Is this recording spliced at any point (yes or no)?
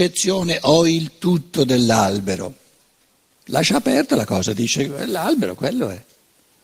no